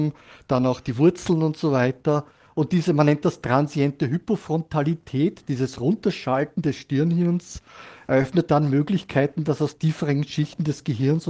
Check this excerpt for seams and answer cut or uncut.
uncut